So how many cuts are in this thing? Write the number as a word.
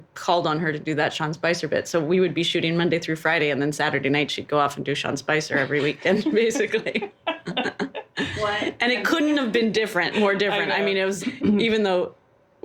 one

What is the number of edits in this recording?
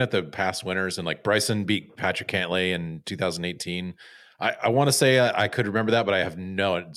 zero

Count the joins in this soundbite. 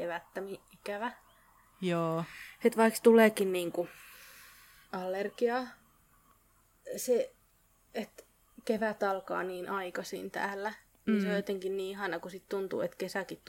zero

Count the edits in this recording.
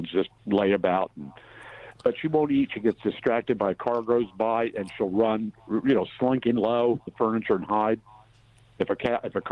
one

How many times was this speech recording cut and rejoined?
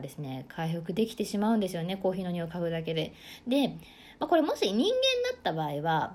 zero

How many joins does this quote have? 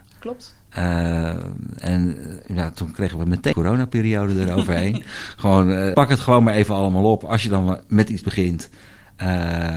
three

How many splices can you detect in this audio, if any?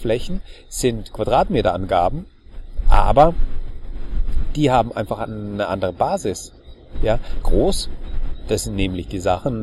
one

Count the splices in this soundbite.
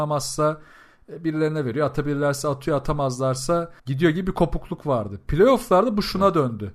one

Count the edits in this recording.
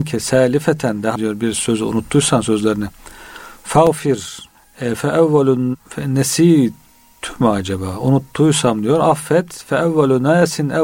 three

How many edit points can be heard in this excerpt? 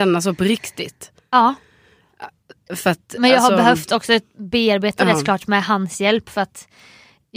zero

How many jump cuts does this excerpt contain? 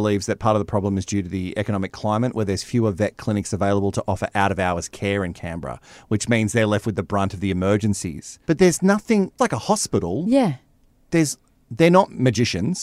two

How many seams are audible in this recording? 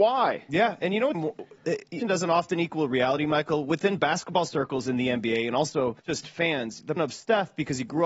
four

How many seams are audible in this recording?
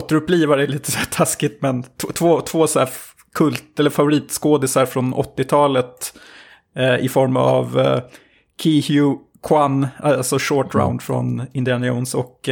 zero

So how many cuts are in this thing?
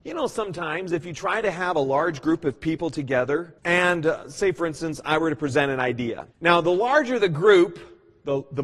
two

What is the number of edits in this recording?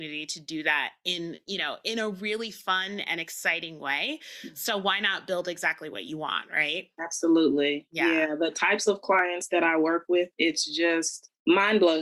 zero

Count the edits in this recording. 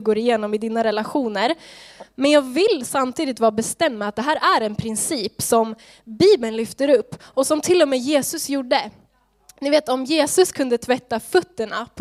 zero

